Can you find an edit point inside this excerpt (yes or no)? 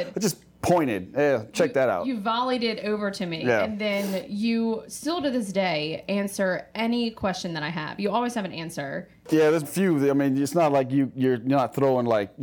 yes